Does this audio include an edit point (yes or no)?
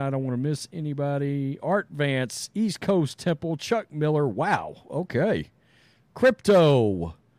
no